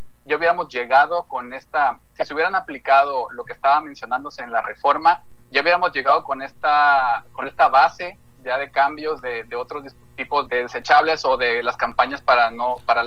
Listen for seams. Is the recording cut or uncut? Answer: cut